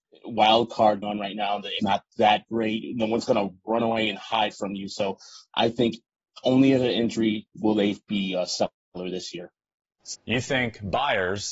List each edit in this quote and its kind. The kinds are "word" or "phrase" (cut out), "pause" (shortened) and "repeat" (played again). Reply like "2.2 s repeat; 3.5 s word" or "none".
1.0 s word; 1.8 s phrase; 7.5 s pause; 10.1 s phrase